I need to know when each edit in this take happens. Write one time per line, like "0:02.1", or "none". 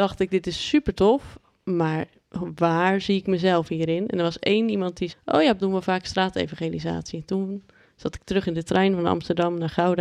0:05.1
0:05.6